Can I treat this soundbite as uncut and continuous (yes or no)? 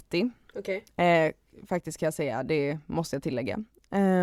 yes